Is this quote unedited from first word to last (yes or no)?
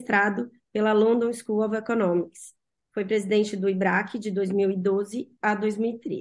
yes